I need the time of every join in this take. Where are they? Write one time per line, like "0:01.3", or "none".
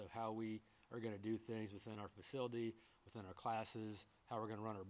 none